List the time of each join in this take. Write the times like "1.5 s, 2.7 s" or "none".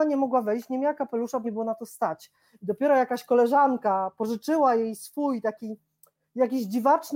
1.4 s